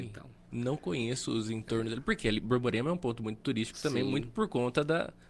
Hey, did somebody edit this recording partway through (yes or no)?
no